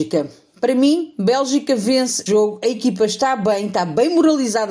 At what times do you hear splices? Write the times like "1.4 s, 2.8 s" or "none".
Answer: 2.3 s